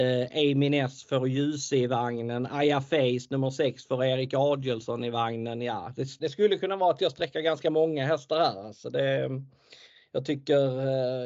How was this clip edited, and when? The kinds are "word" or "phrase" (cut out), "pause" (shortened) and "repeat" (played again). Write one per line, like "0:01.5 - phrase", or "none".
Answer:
0:06.2 - word

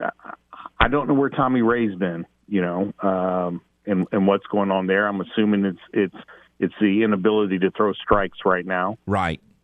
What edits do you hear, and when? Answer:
none

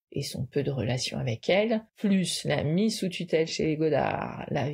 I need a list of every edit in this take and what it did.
0:01.9 - pause

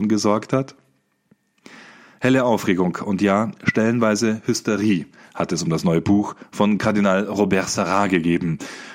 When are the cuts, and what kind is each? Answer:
none

